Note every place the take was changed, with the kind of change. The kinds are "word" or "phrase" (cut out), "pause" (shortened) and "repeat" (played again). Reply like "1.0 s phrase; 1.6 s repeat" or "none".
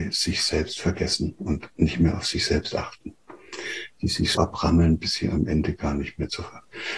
4.3 s word